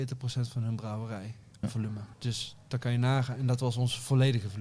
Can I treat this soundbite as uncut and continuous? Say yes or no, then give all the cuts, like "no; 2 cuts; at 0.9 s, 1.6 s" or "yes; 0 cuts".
no; 2 cuts; at 1.6 s, 2.1 s